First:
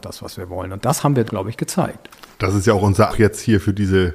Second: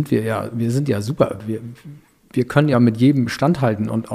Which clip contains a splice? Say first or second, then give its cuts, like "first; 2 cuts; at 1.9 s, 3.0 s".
first; 3 cuts; at 1.3 s, 2.3 s, 3.1 s